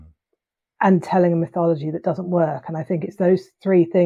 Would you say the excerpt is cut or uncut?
uncut